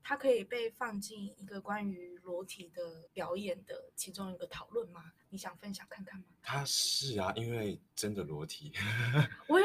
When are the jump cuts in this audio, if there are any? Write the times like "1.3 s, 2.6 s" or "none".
3.1 s

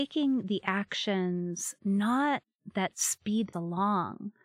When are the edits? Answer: 3.5 s

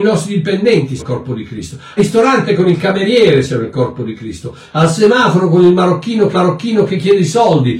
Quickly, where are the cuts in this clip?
1.0 s, 2.0 s, 6.3 s

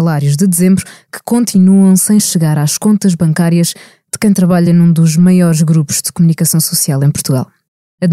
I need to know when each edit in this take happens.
none

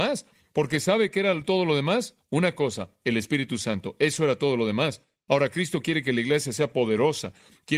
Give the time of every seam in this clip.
none

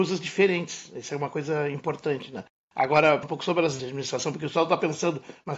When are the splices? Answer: 3.2 s, 3.8 s

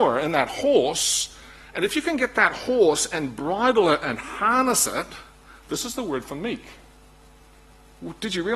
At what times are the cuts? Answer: none

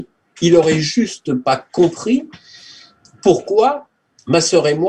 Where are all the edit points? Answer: none

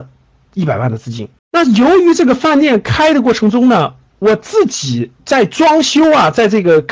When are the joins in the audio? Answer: 1.4 s, 5.2 s

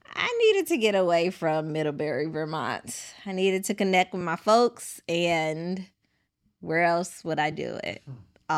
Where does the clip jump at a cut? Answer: none

